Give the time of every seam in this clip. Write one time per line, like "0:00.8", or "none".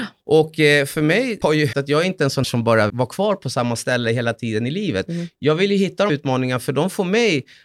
0:01.4
0:01.7
0:02.4
0:02.9
0:05.1
0:06.1